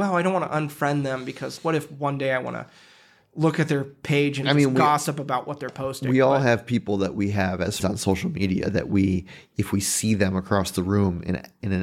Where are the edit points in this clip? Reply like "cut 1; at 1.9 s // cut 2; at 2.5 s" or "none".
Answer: cut 1; at 1.6 s // cut 2; at 4.4 s // cut 3; at 7.8 s